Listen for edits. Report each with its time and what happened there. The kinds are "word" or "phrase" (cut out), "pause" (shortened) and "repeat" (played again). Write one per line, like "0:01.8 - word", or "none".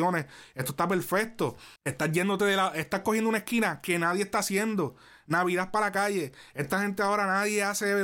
0:01.8 - pause